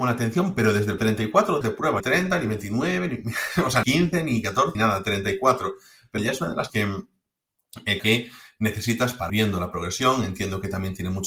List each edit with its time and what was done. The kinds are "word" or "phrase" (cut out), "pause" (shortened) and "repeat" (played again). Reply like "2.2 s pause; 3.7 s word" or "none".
1.0 s word; 1.6 s word; 2.0 s word; 3.8 s word; 4.7 s word; 6.2 s word; 6.7 s word; 8.0 s word; 9.3 s word